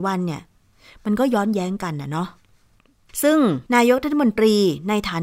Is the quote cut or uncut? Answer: cut